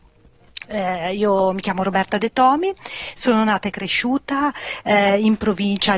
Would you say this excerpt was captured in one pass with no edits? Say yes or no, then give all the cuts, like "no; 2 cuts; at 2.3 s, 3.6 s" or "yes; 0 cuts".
yes; 0 cuts